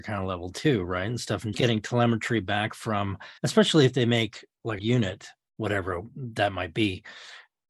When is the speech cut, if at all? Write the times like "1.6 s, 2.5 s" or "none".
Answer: 1.5 s, 3.4 s, 4.8 s